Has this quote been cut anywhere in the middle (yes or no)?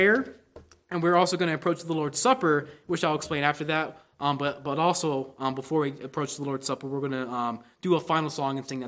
no